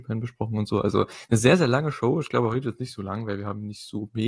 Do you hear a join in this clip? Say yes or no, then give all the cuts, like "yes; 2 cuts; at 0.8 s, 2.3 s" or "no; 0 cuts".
no; 0 cuts